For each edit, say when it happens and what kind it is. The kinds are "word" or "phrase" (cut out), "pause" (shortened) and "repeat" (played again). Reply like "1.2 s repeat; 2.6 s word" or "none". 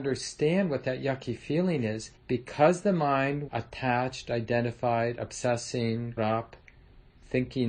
2.2 s pause; 3.5 s word; 6.2 s word